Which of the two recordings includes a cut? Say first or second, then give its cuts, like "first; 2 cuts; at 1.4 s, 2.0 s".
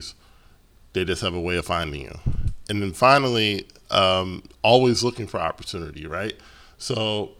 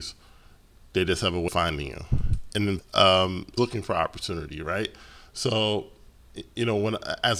second; 3 cuts; at 1.5 s, 2.8 s, 3.6 s